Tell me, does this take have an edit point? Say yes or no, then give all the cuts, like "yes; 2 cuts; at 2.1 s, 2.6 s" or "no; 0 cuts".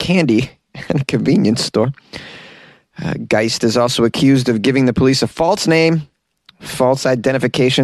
no; 0 cuts